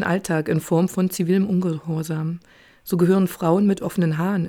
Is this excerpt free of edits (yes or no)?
yes